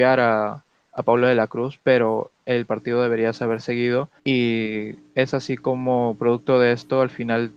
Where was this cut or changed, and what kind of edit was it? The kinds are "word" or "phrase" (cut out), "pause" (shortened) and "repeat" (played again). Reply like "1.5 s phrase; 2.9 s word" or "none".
4.2 s pause